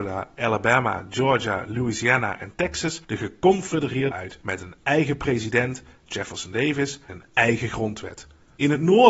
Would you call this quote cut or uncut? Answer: cut